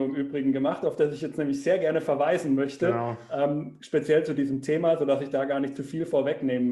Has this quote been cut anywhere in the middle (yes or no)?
no